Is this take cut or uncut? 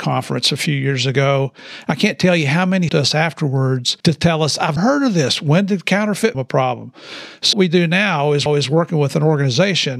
cut